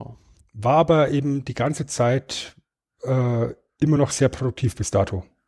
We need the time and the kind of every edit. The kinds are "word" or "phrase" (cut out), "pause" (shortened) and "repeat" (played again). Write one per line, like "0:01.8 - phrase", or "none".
none